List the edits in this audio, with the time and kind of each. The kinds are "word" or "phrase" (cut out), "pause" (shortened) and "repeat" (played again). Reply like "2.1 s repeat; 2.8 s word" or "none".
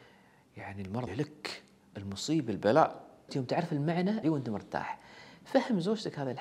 1.1 s word; 3.3 s word; 4.2 s word